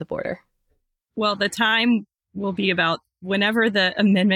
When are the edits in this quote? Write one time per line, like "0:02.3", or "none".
0:02.2